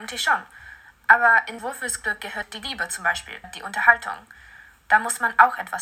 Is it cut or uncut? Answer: cut